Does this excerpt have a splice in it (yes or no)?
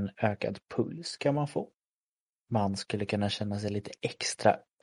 no